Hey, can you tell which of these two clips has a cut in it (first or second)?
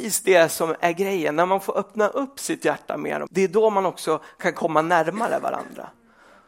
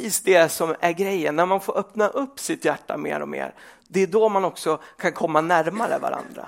first